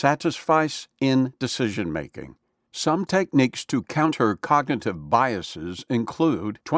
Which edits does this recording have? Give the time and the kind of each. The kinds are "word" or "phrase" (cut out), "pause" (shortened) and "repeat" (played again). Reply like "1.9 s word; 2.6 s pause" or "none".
none